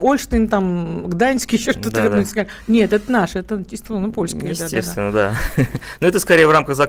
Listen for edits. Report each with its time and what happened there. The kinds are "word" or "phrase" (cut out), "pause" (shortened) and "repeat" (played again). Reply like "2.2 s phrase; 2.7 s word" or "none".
none